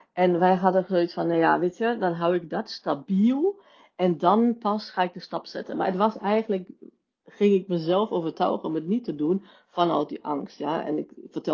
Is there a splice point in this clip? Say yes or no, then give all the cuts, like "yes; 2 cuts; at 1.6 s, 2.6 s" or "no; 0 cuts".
no; 0 cuts